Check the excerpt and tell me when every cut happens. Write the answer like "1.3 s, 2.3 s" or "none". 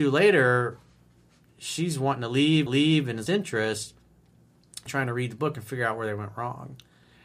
2.7 s, 3.3 s, 4.9 s

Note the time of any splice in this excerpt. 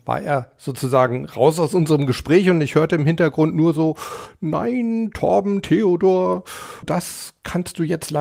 6.8 s

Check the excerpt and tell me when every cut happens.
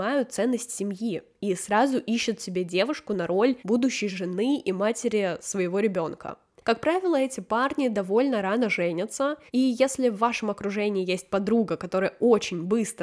3.6 s, 9.5 s

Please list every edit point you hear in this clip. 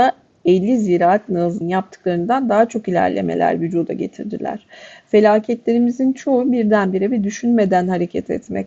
1.6 s

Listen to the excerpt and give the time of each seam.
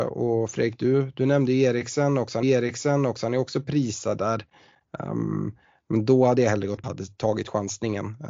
2.4 s, 6.8 s

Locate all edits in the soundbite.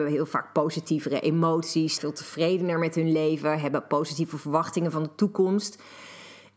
2.0 s

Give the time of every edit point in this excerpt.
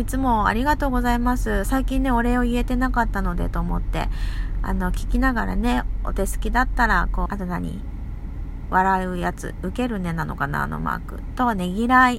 7.3 s

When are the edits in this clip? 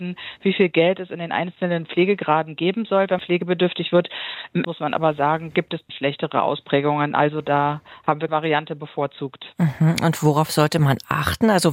3.2 s, 4.6 s, 5.9 s, 8.3 s

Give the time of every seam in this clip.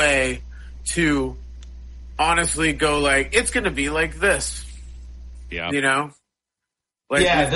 none

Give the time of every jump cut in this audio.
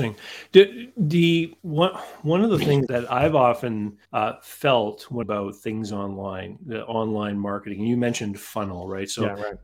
1.6 s, 2.9 s, 4.0 s, 5.2 s

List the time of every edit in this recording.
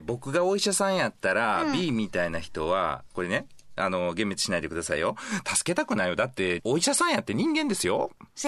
6.6 s

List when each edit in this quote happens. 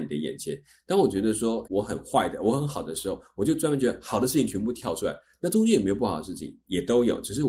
1.6 s

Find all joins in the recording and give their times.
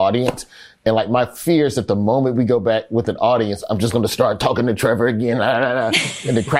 none

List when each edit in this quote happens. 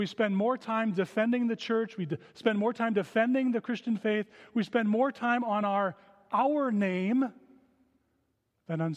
none

